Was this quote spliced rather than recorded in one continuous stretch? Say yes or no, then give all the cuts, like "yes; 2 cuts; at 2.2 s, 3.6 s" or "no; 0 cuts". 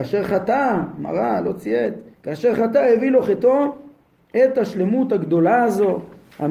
yes; 1 cut; at 2.1 s